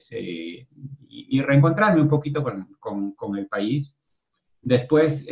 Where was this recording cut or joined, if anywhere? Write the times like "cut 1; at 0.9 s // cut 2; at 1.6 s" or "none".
none